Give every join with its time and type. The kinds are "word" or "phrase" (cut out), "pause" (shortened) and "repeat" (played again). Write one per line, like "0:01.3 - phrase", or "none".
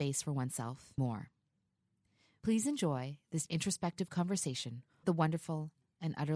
0:01.0 - word
0:03.5 - word
0:05.0 - word